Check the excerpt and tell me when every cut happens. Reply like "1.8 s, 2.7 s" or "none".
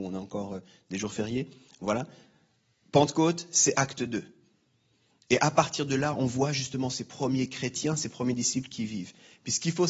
none